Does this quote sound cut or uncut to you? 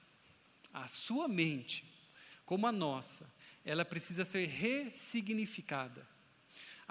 uncut